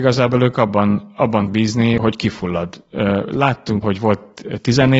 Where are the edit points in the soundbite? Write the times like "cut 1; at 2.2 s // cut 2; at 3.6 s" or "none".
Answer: cut 1; at 1.5 s // cut 2; at 2.0 s // cut 3; at 3.8 s